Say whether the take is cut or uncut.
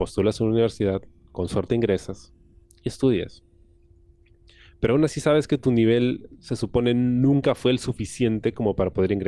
uncut